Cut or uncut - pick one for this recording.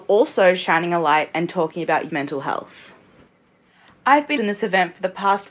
cut